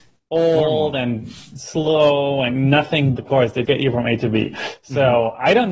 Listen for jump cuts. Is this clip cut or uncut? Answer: cut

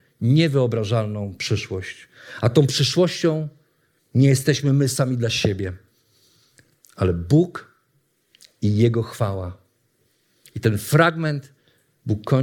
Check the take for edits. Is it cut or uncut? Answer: uncut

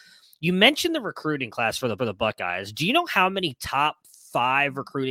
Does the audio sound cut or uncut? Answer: cut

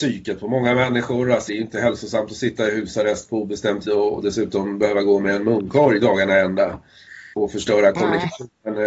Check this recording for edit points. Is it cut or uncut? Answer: cut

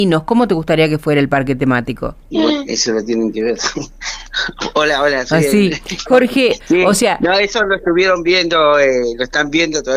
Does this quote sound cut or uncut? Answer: cut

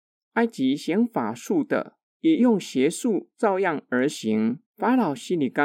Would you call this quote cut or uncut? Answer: cut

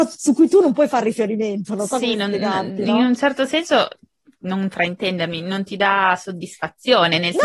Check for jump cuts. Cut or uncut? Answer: uncut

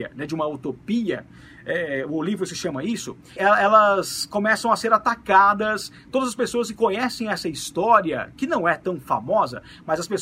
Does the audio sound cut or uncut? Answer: cut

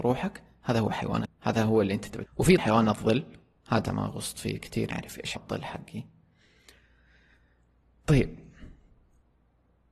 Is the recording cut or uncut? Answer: cut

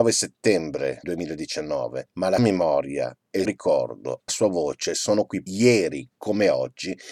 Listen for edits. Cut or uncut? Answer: cut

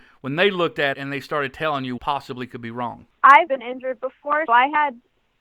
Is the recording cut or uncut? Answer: cut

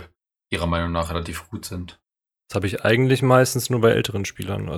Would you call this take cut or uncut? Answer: cut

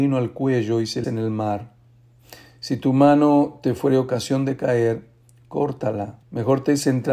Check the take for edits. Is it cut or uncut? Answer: cut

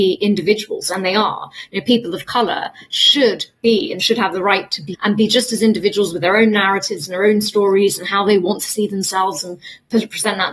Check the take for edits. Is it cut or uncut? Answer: cut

